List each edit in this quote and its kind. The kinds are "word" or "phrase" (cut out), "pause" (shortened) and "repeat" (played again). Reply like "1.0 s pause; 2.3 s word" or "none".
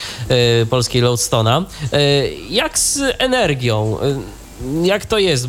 none